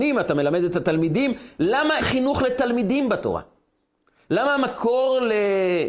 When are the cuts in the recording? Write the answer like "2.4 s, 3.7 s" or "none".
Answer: 2.0 s